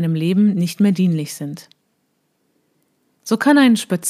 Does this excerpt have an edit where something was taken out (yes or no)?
no